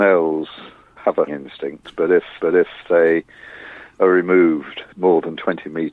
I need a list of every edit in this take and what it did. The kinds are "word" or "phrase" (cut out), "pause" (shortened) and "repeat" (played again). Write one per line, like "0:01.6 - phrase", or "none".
0:01.0 - word
0:01.3 - word
0:02.4 - repeat
0:04.9 - pause